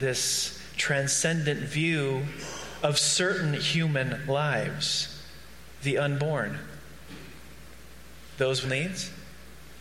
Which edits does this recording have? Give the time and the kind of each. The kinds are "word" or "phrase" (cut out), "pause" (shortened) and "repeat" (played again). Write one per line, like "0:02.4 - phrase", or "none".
0:08.6 - word

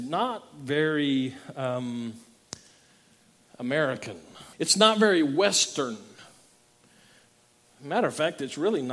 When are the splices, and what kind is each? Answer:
0:04.5 - pause

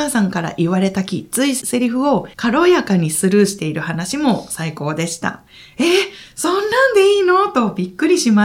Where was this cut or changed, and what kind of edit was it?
0:02.3 - pause

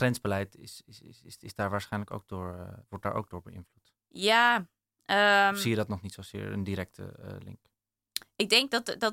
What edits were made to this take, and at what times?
0:02.8 - pause
0:04.0 - pause

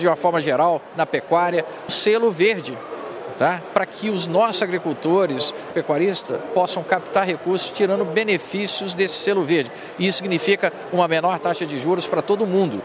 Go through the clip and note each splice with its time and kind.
0:01.9 - word
0:05.7 - phrase

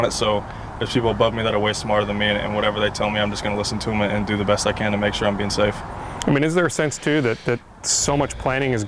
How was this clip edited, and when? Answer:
none

